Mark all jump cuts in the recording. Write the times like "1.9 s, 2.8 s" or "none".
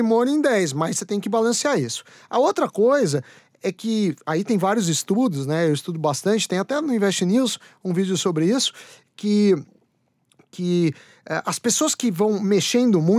none